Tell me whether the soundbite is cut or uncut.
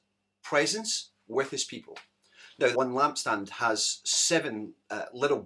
cut